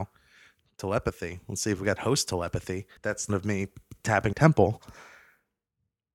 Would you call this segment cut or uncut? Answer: cut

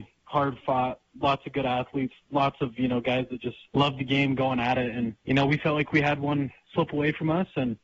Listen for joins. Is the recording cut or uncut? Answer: cut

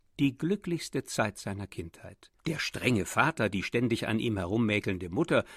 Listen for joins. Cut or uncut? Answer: cut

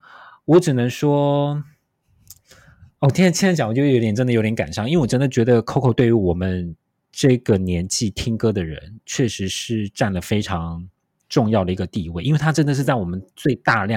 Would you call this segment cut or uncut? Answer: uncut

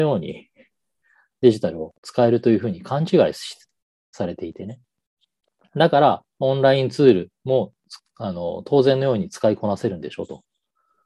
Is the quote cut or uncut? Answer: cut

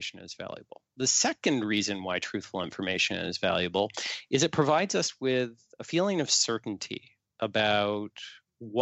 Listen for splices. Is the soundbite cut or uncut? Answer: uncut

